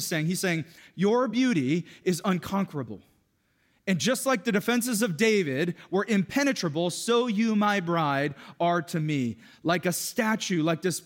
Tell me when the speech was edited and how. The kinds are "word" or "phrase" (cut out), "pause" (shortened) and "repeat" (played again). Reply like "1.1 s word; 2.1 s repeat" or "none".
none